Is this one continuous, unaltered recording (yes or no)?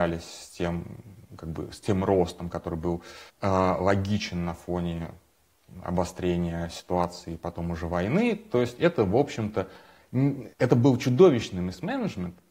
no